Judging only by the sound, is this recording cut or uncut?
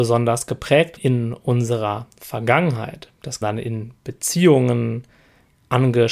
cut